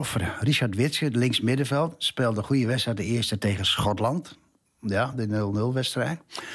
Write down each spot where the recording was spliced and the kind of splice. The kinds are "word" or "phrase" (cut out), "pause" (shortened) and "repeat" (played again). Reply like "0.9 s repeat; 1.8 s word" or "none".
none

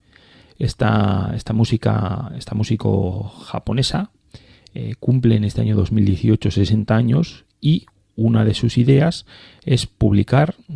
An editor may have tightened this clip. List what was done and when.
none

